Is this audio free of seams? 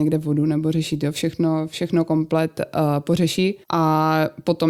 no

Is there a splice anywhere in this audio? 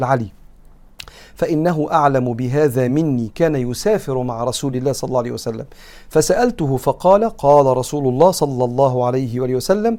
no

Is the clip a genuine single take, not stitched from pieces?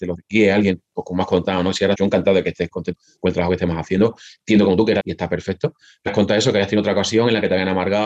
no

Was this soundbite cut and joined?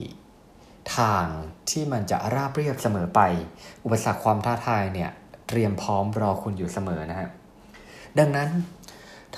no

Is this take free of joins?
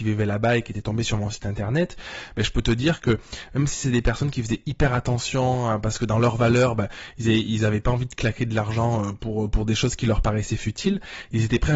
yes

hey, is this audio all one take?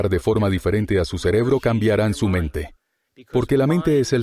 yes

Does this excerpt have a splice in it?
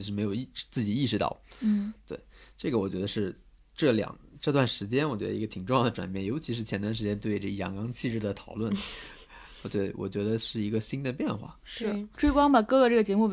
no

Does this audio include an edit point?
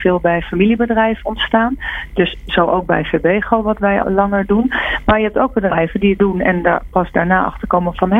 yes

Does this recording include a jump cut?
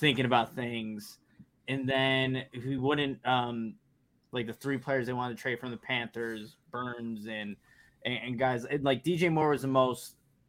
no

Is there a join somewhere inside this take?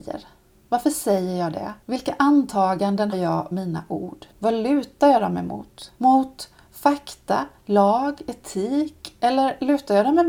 yes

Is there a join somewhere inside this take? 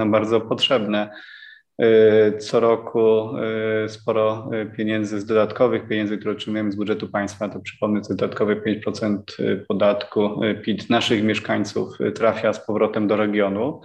no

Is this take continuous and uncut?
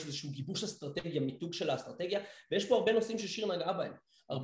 yes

